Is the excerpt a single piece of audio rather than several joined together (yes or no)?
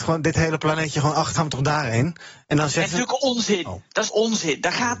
no